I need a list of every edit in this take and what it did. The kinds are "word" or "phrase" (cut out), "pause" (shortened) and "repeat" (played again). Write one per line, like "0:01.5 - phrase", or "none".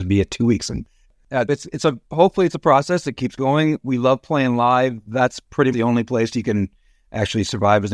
0:01.5 - word
0:05.7 - word